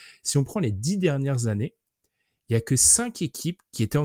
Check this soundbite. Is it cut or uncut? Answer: uncut